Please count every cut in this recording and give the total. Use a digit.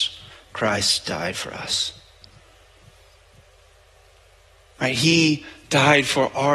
0